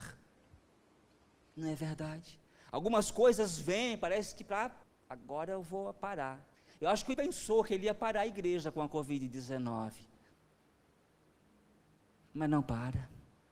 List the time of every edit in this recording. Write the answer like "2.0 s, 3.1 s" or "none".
2.5 s, 4.8 s, 6.5 s, 7.1 s

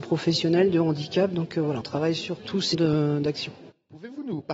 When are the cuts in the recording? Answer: 1.8 s, 2.7 s

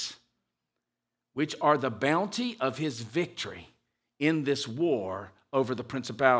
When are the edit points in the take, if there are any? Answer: none

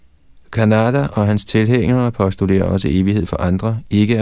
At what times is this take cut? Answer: none

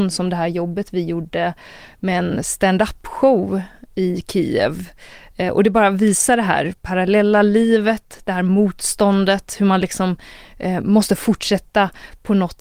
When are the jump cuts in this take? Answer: none

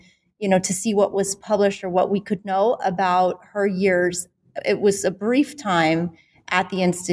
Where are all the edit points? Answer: none

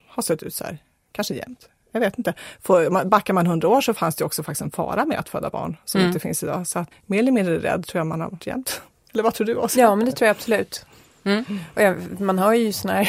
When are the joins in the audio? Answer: 3.9 s, 6.9 s, 8.4 s

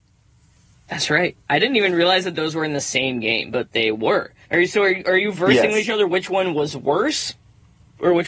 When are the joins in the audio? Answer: 4.4 s

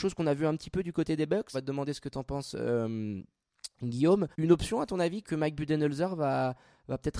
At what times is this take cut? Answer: 1.5 s, 4.3 s, 5.2 s

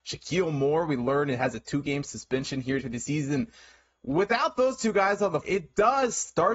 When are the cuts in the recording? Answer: 2.8 s, 5.4 s

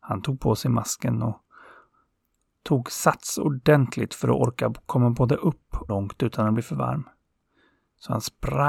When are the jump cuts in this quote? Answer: 5.9 s

